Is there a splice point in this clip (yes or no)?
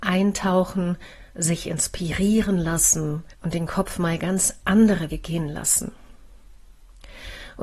yes